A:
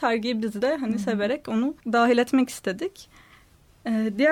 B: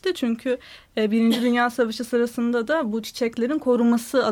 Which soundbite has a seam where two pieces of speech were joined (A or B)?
A